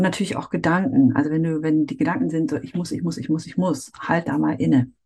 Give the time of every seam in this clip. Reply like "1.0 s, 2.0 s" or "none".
none